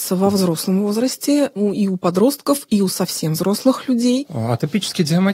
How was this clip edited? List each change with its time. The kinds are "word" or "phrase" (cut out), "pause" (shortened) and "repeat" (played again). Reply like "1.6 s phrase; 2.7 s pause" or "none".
none

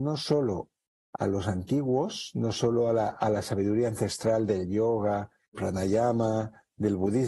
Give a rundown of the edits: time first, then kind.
5.5 s word

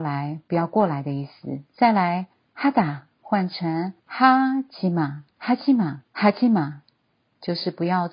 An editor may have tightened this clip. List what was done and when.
1.7 s pause; 2.5 s pause; 4.0 s pause; 5.3 s pause; 6.1 s pause

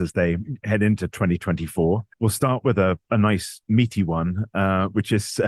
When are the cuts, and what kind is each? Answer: 2.1 s pause

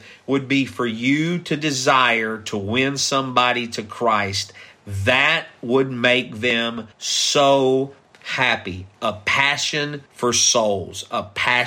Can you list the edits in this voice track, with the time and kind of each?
6.9 s pause; 10.1 s pause

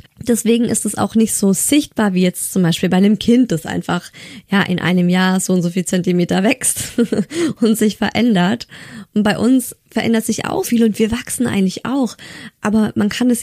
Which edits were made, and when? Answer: 9.8 s pause; 10.6 s word

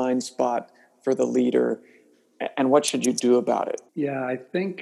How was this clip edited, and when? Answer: 3.9 s pause

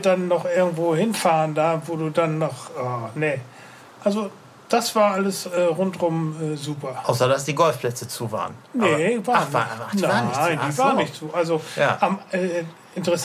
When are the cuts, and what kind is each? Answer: none

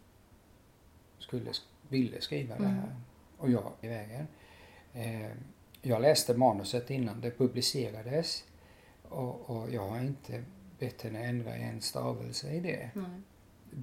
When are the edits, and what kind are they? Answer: 3.8 s phrase; 5.7 s pause

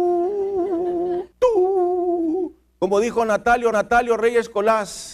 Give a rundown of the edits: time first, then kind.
1.3 s pause; 3.7 s repeat

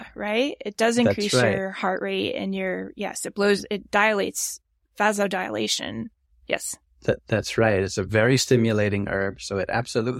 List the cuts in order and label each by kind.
none

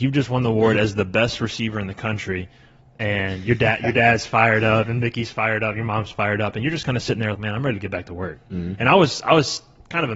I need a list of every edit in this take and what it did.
7.3 s word

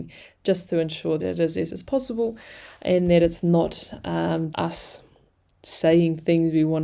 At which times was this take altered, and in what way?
1.2 s word; 1.7 s word; 4.5 s word

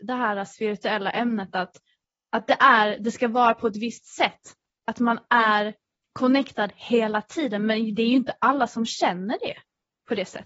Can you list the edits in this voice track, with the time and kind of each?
none

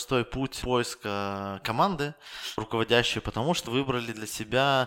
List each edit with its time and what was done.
2.6 s word; 3.7 s word

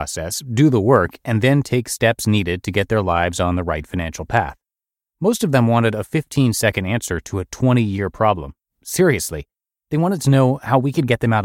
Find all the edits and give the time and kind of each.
none

